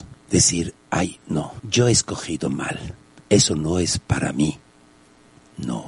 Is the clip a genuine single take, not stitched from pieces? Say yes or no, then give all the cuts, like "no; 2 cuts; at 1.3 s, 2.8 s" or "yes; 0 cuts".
yes; 0 cuts